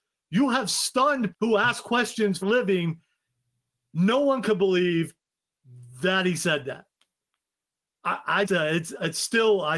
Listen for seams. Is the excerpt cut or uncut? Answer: cut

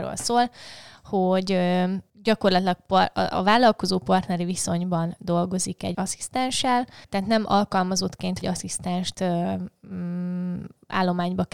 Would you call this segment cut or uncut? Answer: cut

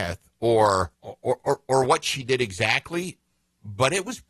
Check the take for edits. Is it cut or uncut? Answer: cut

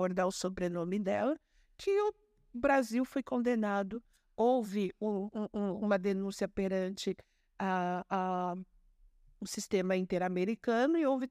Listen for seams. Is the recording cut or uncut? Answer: uncut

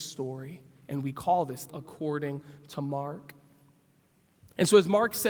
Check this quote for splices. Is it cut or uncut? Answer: cut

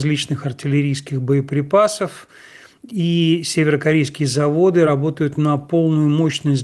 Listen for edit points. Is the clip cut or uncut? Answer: uncut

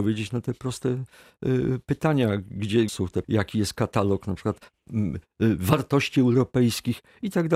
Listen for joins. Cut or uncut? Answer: cut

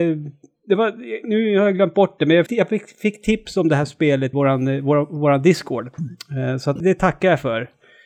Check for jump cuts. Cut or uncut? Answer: cut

